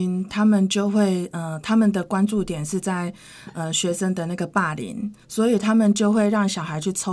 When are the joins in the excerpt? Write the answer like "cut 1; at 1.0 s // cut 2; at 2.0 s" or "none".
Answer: cut 1; at 5.2 s